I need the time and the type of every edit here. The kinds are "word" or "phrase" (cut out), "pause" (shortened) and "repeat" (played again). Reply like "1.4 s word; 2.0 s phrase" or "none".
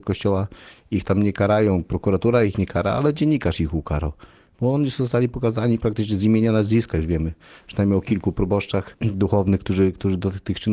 none